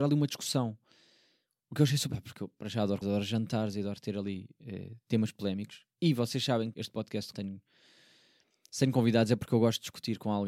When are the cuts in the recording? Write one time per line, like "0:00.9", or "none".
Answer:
0:02.1
0:03.0
0:06.7
0:07.3